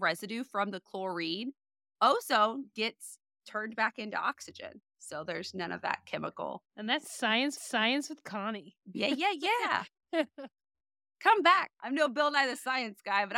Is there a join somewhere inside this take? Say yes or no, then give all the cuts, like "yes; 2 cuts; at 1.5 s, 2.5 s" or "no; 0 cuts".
yes; 6 cuts; at 2.7 s, 4.9 s, 6.7 s, 7.6 s, 8.8 s, 11.7 s